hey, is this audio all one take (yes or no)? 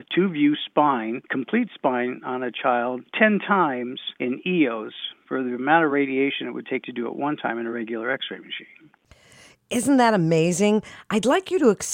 yes